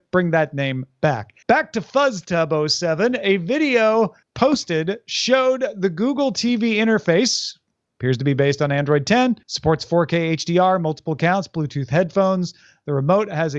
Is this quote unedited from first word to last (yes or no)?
no